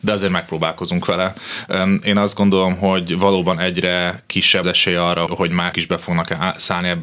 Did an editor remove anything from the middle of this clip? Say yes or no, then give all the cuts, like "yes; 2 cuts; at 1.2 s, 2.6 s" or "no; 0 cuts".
yes; 3 cuts; at 4.6 s, 5.3 s, 5.7 s